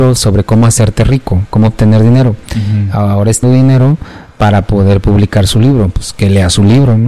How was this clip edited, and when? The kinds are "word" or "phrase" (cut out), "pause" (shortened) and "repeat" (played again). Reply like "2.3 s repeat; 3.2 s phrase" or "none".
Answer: 3.4 s word